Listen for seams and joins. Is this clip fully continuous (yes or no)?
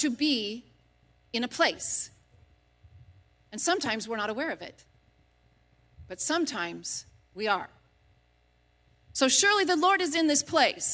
yes